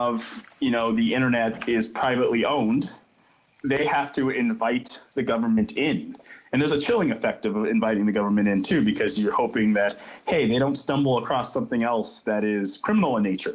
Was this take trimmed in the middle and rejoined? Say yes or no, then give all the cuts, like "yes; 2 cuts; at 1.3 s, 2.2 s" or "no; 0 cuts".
no; 0 cuts